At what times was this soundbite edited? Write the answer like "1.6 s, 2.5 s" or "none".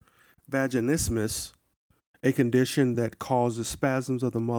none